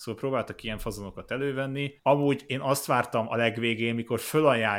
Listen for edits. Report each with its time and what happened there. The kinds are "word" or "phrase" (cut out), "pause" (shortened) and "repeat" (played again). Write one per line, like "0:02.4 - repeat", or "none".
0:02.0 - pause